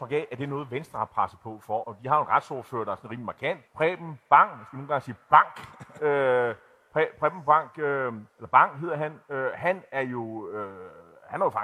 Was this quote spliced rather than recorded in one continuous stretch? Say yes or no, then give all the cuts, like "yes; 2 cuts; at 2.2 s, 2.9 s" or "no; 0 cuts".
yes; 3 cuts; at 1.8 s, 3.7 s, 8.3 s